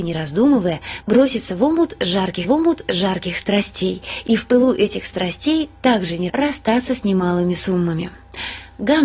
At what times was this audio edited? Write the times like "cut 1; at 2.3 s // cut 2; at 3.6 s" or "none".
cut 1; at 2.4 s // cut 2; at 6.3 s